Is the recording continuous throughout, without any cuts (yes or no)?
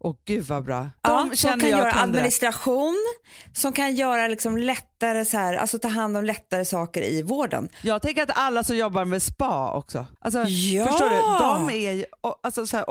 no